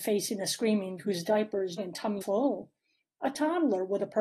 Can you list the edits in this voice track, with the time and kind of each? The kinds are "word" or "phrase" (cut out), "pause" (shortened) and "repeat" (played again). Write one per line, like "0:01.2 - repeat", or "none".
0:01.0 - word
0:01.8 - word
0:02.2 - word